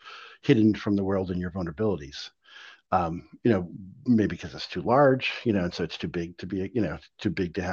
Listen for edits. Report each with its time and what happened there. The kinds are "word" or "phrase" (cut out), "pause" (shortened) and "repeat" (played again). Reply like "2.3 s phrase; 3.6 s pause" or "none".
none